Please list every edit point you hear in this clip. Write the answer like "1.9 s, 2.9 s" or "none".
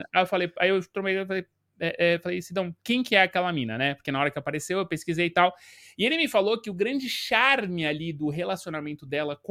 none

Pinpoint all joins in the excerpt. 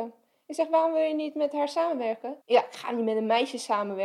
2.4 s

